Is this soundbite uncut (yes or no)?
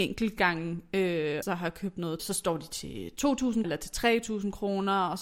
no